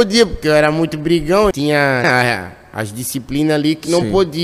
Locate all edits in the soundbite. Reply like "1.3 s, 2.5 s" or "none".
1.5 s, 2.0 s